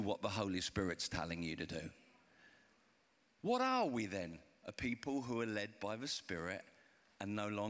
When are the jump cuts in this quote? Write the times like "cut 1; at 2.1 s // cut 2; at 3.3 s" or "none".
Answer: none